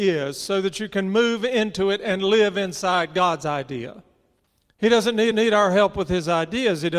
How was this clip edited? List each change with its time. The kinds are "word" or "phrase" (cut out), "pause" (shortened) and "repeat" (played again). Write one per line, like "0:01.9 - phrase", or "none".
0:04.5 - pause
0:05.3 - repeat